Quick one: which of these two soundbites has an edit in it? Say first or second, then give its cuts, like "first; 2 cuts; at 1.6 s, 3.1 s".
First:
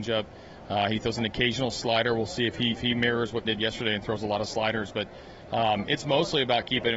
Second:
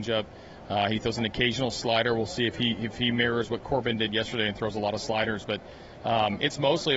first; 2 cuts; at 2.7 s, 3.4 s